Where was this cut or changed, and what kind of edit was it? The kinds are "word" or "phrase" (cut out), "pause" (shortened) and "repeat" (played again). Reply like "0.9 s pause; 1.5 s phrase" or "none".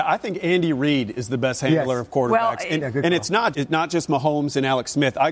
3.5 s word